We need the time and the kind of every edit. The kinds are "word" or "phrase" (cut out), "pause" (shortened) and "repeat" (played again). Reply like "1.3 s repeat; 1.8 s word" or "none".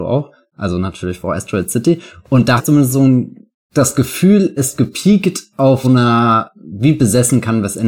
2.6 s word; 4.6 s word; 5.8 s word